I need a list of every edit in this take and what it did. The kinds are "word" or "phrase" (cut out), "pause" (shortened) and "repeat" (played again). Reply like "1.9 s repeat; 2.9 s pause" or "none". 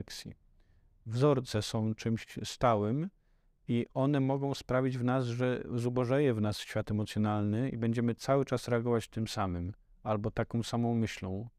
none